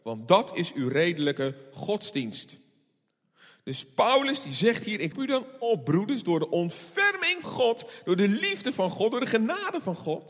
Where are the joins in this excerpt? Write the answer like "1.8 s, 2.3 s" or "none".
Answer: 5.1 s, 7.4 s